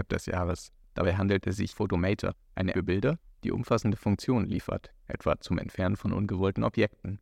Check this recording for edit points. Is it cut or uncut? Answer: cut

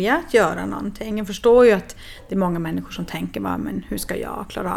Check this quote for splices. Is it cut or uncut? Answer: uncut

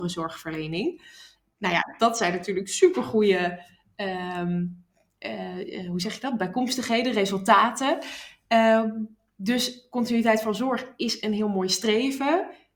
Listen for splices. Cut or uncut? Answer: uncut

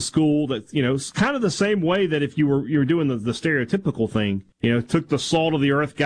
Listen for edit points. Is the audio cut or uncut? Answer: cut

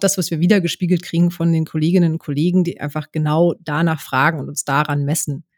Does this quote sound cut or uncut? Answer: uncut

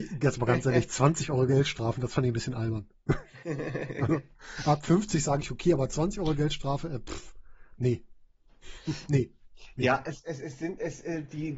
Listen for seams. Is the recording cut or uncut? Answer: uncut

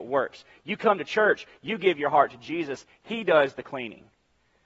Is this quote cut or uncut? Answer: uncut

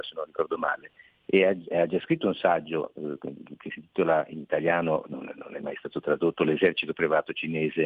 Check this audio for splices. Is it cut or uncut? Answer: uncut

